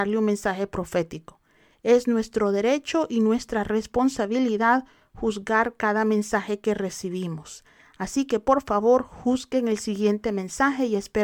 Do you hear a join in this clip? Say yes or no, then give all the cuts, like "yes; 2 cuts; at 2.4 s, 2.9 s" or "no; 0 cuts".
no; 0 cuts